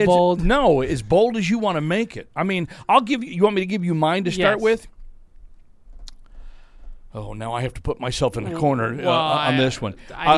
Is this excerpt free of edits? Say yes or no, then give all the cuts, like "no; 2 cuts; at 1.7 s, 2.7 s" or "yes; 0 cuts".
yes; 0 cuts